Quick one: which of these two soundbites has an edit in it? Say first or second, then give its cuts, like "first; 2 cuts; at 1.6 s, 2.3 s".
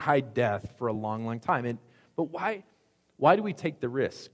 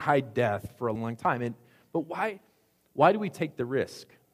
second; 1 cut; at 1.0 s